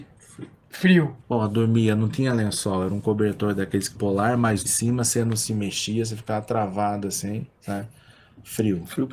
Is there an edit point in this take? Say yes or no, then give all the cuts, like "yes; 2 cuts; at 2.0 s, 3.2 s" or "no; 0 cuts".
yes; 3 cuts; at 1.2 s, 4.0 s, 4.7 s